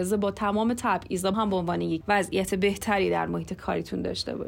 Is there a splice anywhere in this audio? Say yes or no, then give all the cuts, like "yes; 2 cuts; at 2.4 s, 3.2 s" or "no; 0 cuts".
yes; 2 cuts; at 1.3 s, 2.0 s